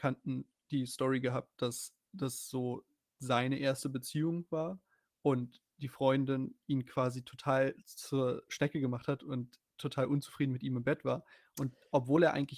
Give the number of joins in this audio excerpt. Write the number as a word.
zero